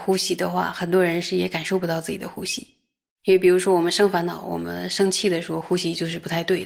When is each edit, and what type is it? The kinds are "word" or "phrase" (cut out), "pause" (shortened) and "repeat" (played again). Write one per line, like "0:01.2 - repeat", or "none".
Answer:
none